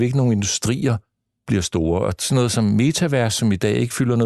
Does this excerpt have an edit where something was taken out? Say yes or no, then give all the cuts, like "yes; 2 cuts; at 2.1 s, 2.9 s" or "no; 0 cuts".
no; 0 cuts